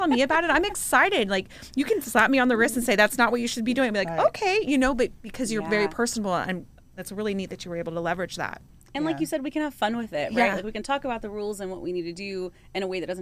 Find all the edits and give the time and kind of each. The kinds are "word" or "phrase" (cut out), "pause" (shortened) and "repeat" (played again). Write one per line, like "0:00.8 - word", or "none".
none